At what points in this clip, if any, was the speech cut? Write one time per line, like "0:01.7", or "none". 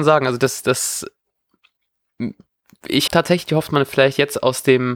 0:03.1
0:03.7